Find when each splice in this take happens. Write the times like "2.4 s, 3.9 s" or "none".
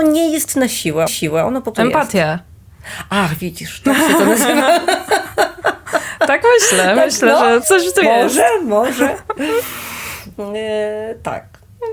1.1 s, 1.7 s, 7.6 s, 8.0 s